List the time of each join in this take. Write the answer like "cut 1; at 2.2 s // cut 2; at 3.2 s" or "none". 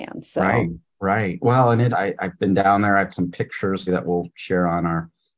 cut 1; at 1.9 s // cut 2; at 3.1 s // cut 3; at 3.9 s